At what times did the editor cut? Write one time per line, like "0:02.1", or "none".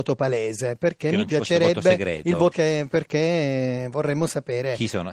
0:02.5